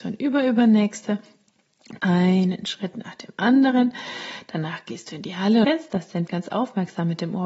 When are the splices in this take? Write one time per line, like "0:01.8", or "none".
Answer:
0:02.0
0:05.6
0:06.3